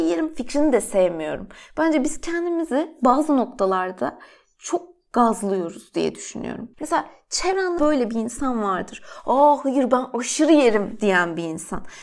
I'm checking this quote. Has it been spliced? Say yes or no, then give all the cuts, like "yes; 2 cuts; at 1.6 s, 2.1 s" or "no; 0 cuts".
yes; 2 cuts; at 6.7 s, 7.8 s